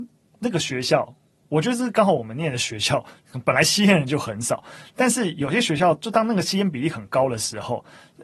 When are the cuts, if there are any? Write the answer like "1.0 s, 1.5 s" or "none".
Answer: none